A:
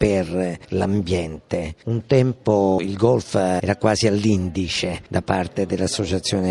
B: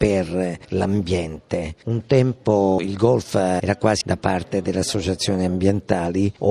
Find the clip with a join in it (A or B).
B